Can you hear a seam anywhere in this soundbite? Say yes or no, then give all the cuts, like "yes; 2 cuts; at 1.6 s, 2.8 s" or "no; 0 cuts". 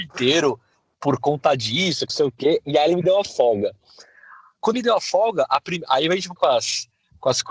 yes; 3 cuts; at 2.1 s, 4.7 s, 6.4 s